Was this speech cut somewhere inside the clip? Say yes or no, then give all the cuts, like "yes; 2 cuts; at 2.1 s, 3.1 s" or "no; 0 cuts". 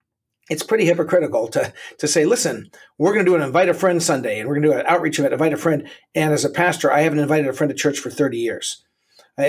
no; 0 cuts